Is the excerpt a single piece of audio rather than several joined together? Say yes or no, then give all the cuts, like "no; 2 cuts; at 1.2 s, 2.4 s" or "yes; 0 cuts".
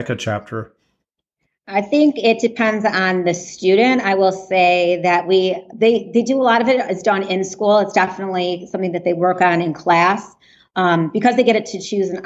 yes; 0 cuts